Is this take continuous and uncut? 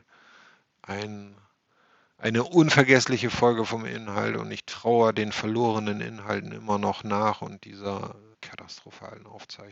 no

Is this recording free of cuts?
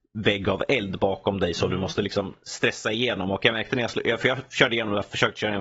yes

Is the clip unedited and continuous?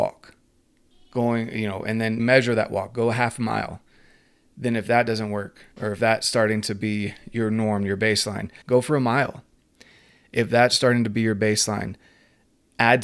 no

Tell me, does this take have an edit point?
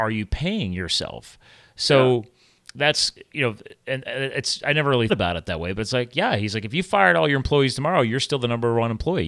yes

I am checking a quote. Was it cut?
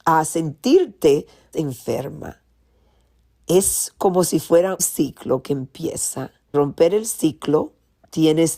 yes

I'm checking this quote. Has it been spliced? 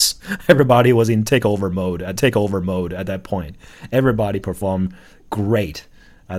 yes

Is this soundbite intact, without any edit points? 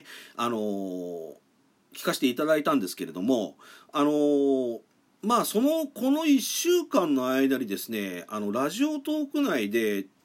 yes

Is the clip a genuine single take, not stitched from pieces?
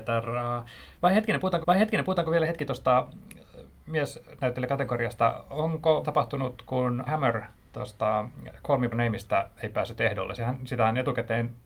no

